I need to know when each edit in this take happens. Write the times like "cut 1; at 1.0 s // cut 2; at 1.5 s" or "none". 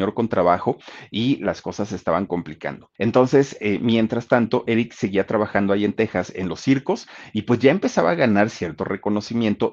cut 1; at 3.0 s